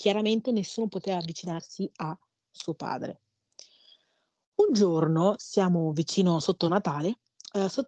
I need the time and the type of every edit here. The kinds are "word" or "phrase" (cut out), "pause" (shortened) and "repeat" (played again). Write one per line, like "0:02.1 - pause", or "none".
none